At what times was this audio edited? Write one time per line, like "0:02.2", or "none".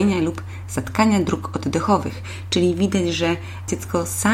none